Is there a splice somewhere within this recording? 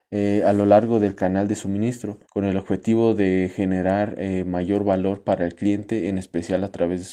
yes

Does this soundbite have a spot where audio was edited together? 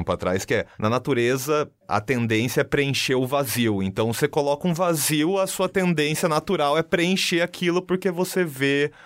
no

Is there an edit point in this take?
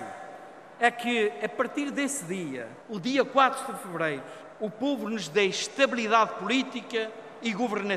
yes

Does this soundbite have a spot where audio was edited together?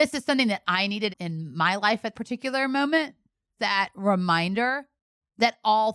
yes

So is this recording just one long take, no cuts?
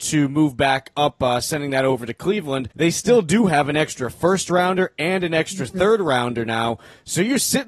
no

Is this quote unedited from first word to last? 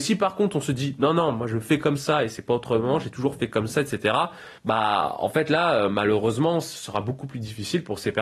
no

